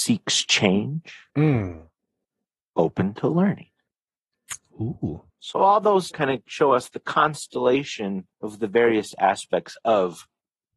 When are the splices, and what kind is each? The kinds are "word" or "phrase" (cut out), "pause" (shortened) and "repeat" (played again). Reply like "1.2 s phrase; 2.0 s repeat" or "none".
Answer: 1.3 s pause; 5.3 s pause; 6.1 s word; 8.3 s pause

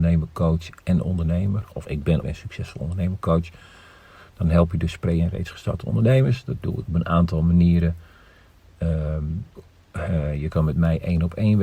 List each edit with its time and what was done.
1.8 s word; 2.2 s word; 6.9 s word; 9.6 s word

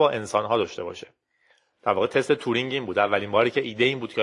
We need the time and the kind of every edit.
none

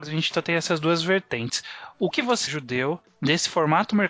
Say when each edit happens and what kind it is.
2.1 s word; 2.5 s word

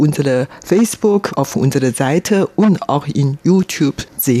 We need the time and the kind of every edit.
1.3 s word

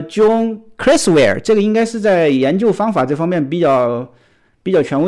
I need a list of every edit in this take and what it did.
none

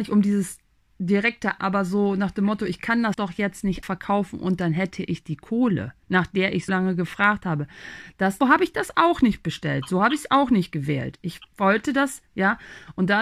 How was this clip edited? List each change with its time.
1.6 s word; 3.1 s word; 3.8 s word; 6.7 s word; 8.4 s word

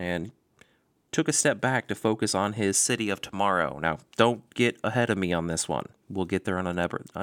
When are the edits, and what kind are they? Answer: 5.9 s pause

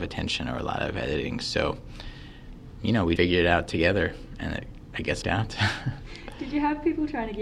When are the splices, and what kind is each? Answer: 3.2 s word; 5.2 s phrase

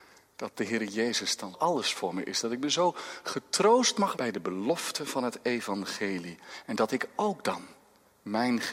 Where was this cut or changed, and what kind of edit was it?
1.5 s word; 4.1 s word

